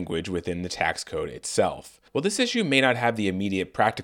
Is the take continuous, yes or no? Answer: no